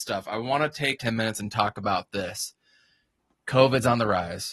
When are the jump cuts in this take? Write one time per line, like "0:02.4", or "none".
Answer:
0:01.0